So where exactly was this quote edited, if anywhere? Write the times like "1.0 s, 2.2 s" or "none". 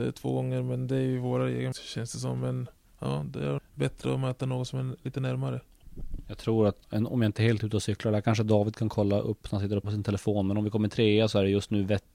1.7 s, 3.6 s, 6.8 s, 9.8 s